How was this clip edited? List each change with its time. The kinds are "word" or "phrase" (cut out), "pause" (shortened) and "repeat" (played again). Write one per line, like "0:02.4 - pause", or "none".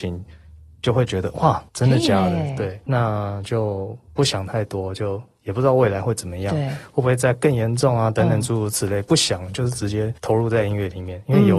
0:01.7 - pause
0:02.9 - word
0:10.2 - pause